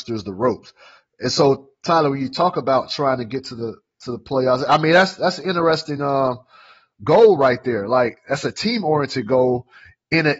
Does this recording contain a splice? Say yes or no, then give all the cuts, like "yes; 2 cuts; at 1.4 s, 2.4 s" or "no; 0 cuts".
no; 0 cuts